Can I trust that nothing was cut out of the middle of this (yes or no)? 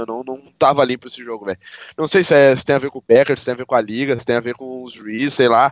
yes